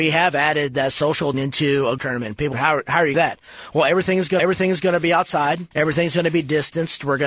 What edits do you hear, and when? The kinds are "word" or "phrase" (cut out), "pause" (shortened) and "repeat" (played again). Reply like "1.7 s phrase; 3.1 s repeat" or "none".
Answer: 1.3 s word; 2.0 s word; 2.5 s word; 3.1 s phrase; 4.4 s repeat; 5.7 s pause